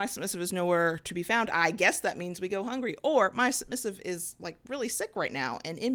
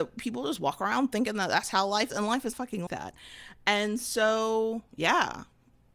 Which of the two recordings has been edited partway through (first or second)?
second